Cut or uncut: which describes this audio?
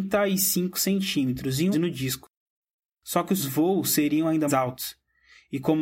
cut